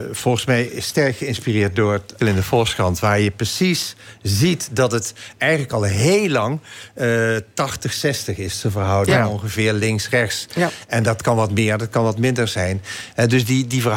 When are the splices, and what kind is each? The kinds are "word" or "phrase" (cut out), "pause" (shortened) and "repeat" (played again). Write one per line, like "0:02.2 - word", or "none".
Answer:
0:02.2 - word